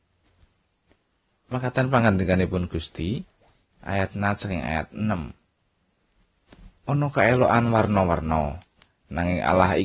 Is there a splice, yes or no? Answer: no